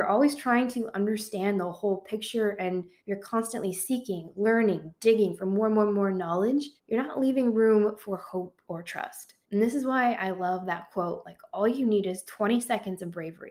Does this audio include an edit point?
yes; 3 cuts; at 3.0 s, 6.8 s, 9.4 s

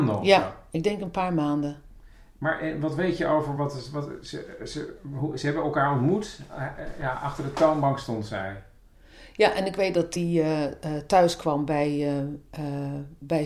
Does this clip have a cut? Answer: no; 0 cuts

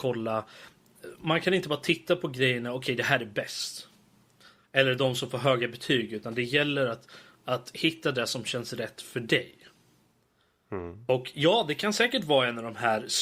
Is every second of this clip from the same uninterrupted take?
yes; 0 cuts

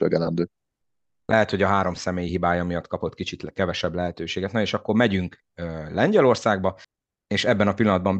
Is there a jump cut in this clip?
no; 0 cuts

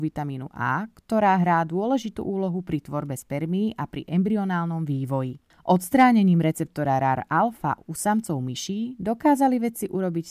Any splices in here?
no; 0 cuts

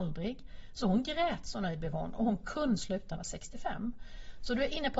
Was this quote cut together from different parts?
yes; 2 cuts; at 2.8 s, 3.2 s

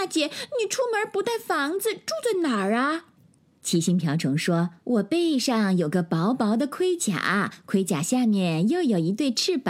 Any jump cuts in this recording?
yes; 2 cuts; at 3.2 s, 4.8 s

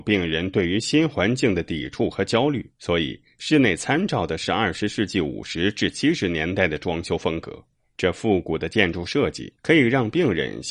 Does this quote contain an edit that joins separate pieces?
yes; 3 cuts; at 2.7 s, 7.7 s, 9.6 s

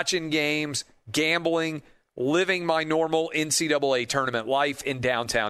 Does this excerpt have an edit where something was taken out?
no; 0 cuts

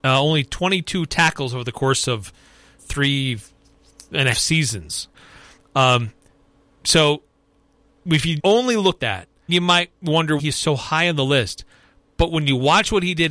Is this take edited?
yes; 6 cuts; at 2.8 s, 4.3 s, 8.4 s, 9.0 s, 9.5 s, 10.4 s

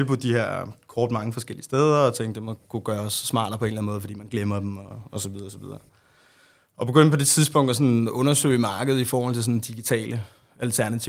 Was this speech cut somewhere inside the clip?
no; 0 cuts

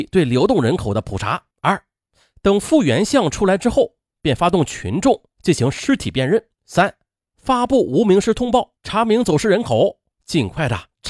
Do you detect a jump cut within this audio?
yes; 3 cuts; at 1.5 s, 6.5 s, 8.8 s

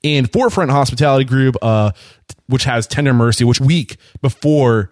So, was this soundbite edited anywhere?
yes; 1 cut; at 3.6 s

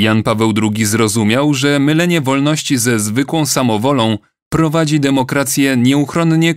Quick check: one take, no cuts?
yes; 0 cuts

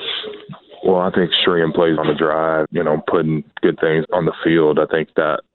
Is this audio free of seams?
no; 3 cuts; at 2.0 s, 2.7 s, 4.0 s

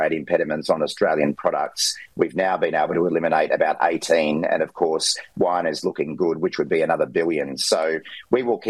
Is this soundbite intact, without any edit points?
yes; 0 cuts

